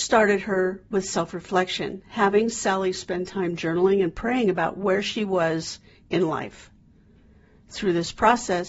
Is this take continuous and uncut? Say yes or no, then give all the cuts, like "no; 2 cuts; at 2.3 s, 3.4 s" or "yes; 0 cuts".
yes; 0 cuts